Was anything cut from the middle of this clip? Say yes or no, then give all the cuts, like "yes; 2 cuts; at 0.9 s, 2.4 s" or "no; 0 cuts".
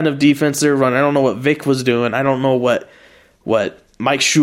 no; 0 cuts